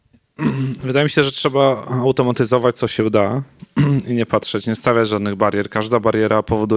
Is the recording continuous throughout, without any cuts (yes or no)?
yes